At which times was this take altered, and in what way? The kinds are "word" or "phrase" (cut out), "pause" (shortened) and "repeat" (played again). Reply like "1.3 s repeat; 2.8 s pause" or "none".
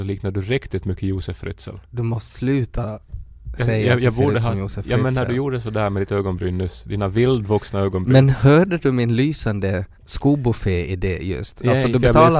1.8 s pause; 10.0 s pause